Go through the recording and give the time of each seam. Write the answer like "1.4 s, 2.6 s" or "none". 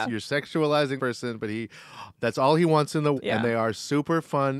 1.0 s, 3.2 s